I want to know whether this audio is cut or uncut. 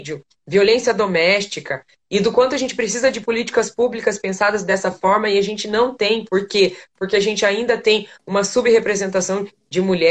uncut